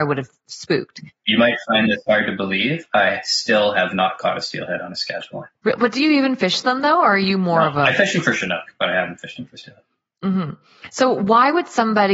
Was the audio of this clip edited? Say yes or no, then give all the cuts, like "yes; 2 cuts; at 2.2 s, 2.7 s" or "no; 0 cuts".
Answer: no; 0 cuts